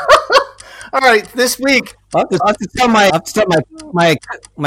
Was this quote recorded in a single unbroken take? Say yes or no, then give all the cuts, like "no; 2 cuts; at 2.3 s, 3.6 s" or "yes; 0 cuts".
no; 2 cuts; at 2.4 s, 3.1 s